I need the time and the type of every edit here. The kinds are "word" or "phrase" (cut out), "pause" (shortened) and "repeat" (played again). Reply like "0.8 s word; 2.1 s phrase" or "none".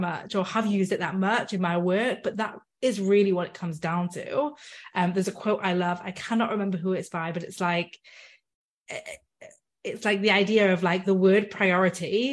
none